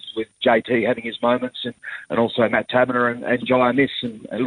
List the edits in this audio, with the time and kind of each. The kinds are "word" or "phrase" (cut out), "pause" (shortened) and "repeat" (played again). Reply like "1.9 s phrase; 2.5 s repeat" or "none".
none